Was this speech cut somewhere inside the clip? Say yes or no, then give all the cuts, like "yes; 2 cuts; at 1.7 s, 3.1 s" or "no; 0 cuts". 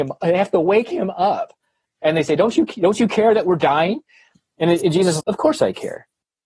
yes; 1 cut; at 5.2 s